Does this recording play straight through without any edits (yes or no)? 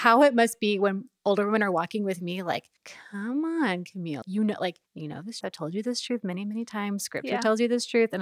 no